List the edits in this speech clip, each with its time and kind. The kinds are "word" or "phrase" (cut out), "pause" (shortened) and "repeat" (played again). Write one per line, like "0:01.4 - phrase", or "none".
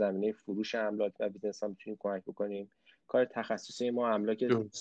none

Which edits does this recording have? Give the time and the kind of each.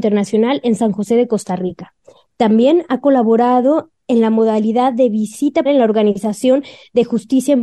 0:05.7 - word

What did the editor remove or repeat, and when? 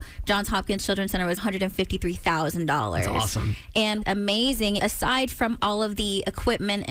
0:01.4 - phrase
0:04.0 - word
0:04.8 - word
0:05.6 - word

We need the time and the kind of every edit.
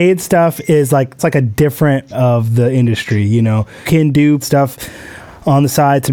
0:01.2 - word
0:02.1 - word
0:03.8 - word
0:04.4 - word

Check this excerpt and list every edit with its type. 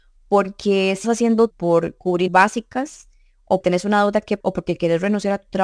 0:01.0 - word
0:01.5 - word
0:02.3 - word
0:03.6 - word
0:04.4 - word

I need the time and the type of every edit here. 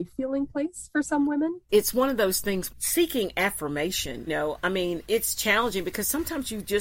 0:01.7 - phrase
0:02.7 - phrase
0:04.3 - word
0:05.0 - word

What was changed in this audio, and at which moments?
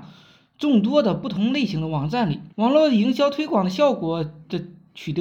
0:02.5 - pause

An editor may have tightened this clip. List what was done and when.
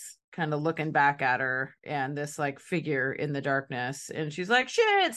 none

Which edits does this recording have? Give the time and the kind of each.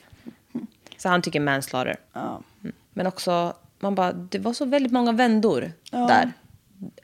0:02.1 - pause
0:02.8 - pause

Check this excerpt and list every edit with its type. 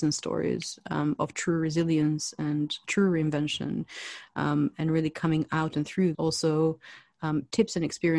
0:02.8 - word
0:06.1 - phrase

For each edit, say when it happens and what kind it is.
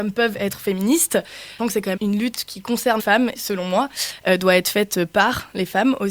0:01.6 - word
0:02.0 - word
0:03.0 - word
0:03.3 - phrase

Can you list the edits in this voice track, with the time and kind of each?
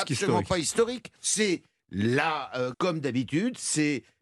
0:01.2 - pause
0:02.7 - word

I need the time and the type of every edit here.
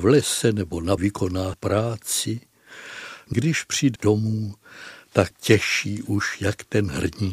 0:01.0 - word
0:01.5 - word
0:03.3 - word
0:04.0 - word
0:05.3 - word

